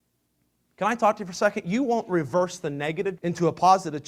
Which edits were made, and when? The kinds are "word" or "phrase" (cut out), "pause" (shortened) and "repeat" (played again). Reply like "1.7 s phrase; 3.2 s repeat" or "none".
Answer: 3.2 s word